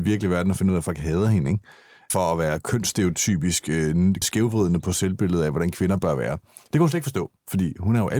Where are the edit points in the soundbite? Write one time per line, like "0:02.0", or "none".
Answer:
0:04.2